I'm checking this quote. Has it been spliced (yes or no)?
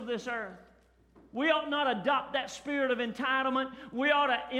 no